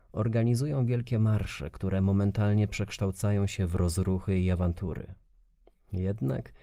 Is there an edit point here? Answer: no; 0 cuts

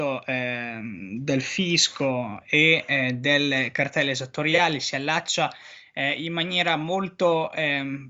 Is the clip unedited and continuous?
yes; 0 cuts

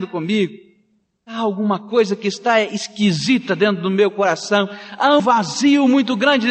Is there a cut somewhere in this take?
yes; 1 cut; at 5.2 s

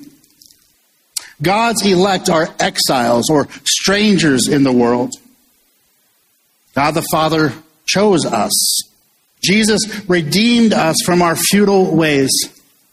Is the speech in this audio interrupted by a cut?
yes; 1 cut; at 9.2 s

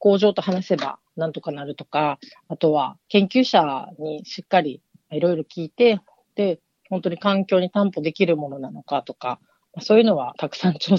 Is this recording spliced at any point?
no; 0 cuts

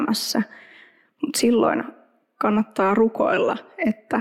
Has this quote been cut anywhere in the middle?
no; 0 cuts

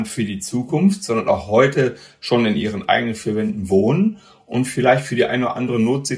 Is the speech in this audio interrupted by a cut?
no; 0 cuts

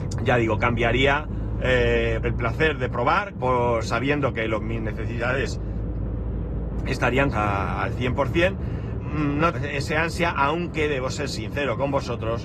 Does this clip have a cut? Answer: yes; 6 cuts; at 2.2 s, 3.3 s, 4.6 s, 7.3 s, 9.0 s, 9.5 s

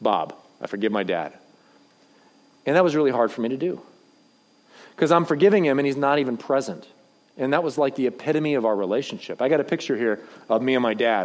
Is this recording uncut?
yes; 0 cuts

